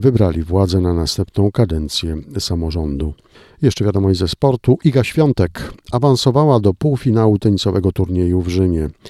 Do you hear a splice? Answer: no; 0 cuts

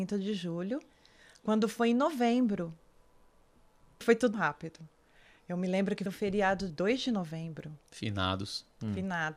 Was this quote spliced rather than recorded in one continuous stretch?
yes; 4 cuts; at 4.0 s, 4.3 s, 6.1 s, 6.7 s

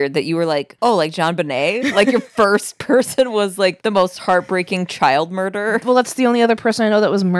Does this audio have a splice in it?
no; 0 cuts

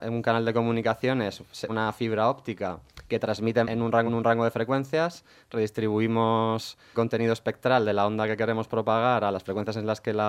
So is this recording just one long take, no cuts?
no; 4 cuts; at 1.7 s, 3.6 s, 4.1 s, 6.9 s

